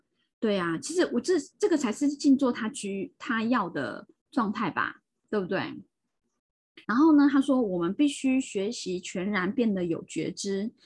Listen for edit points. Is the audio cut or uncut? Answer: cut